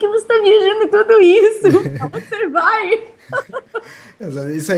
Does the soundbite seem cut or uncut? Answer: cut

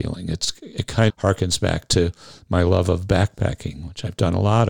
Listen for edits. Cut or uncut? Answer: cut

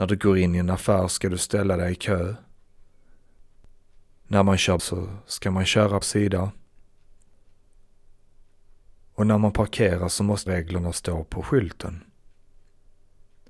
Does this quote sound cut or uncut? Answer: cut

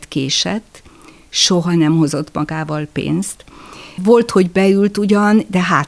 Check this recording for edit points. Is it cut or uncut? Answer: uncut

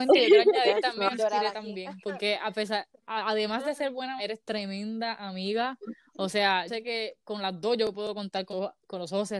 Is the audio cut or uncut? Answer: cut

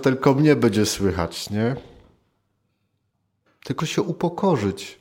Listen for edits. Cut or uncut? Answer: cut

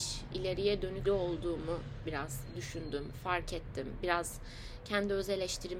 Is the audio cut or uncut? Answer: cut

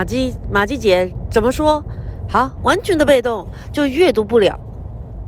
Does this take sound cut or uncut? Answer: cut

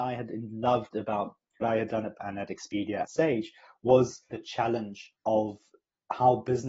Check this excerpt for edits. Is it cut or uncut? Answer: cut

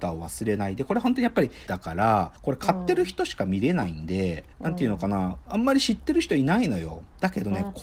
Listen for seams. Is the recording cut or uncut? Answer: cut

